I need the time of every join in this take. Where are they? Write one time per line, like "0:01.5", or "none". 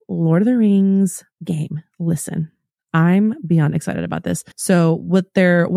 0:04.5